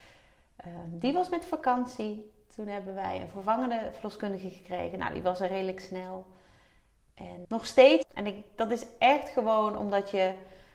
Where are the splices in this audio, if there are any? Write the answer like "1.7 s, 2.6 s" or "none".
7.4 s, 8.0 s